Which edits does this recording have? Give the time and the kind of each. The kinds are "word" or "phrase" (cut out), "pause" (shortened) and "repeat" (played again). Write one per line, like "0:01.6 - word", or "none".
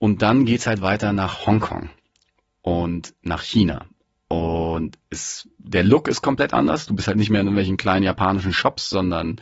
none